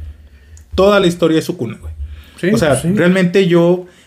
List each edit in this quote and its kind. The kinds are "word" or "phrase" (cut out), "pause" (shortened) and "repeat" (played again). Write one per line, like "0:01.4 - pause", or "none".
none